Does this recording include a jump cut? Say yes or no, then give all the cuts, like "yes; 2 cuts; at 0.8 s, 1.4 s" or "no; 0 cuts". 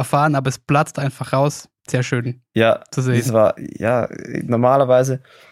yes; 1 cut; at 1.8 s